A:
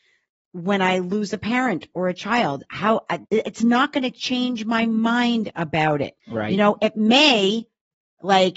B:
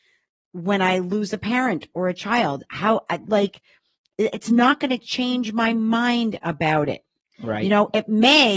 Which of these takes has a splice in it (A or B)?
A